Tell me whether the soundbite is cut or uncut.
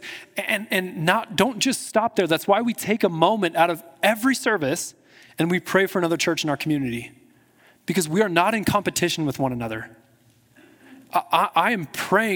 uncut